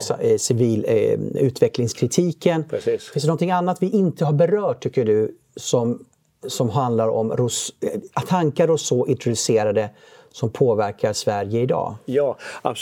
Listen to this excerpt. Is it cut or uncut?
uncut